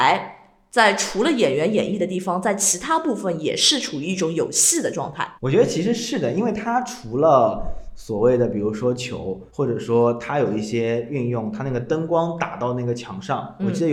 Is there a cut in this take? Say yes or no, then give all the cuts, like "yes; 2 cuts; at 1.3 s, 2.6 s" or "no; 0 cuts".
yes; 2 cuts; at 5.4 s, 9.5 s